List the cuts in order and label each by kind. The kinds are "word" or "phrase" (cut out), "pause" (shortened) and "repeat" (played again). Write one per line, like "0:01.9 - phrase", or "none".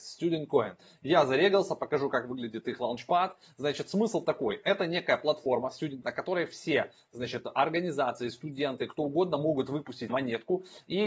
0:06.0 - word
0:10.1 - word